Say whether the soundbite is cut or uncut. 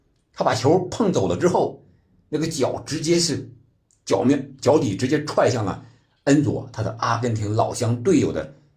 uncut